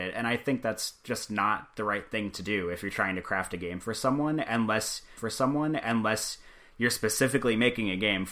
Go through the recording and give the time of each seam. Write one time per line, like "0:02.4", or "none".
0:05.2

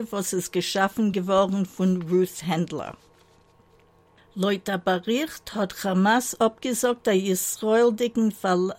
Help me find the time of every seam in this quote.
none

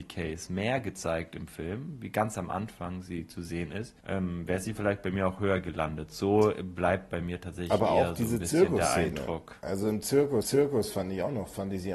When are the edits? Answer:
0:04.0
0:10.4

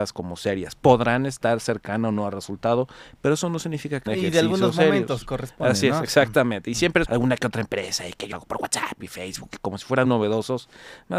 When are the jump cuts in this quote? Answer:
0:04.1
0:07.0
0:08.3
0:10.0

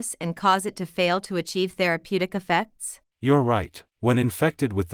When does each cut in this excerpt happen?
0:03.1
0:03.9

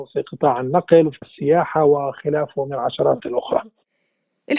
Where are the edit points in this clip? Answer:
0:01.2
0:03.2

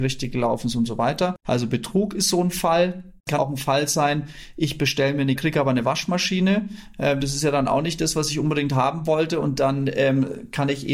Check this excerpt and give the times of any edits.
0:01.4
0:03.4
0:05.4

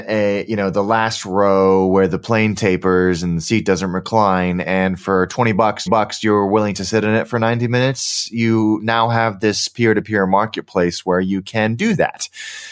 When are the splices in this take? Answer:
0:05.9

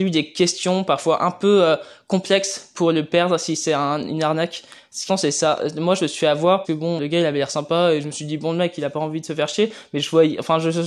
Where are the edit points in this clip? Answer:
0:05.1
0:06.6
0:07.0

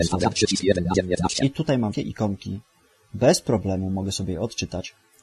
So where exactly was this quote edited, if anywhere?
0:01.9

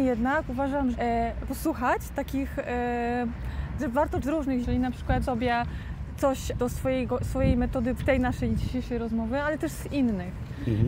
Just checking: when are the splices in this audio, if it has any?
0:00.9
0:01.4
0:03.8
0:04.2
0:04.6
0:05.2
0:06.6
0:08.0

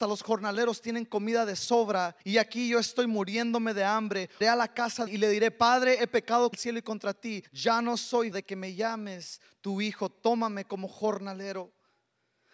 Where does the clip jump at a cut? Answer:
0:02.2
0:04.4
0:05.1
0:06.5
0:07.5
0:08.3

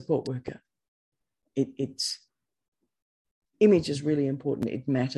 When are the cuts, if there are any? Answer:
none

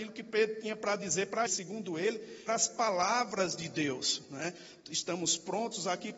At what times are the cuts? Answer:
0:01.5
0:02.5
0:04.8

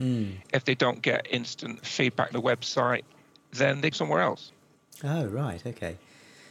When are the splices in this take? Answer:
0:01.8
0:02.3
0:03.9

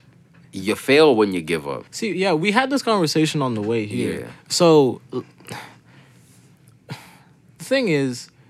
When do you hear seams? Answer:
0:01.9
0:05.0

